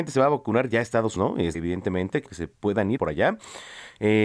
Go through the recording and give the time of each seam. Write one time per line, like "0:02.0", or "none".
0:01.2
0:01.5
0:02.3
0:03.0